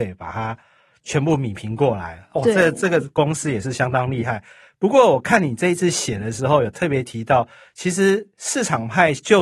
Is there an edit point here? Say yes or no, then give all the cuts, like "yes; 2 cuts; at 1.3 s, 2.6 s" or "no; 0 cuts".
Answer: no; 0 cuts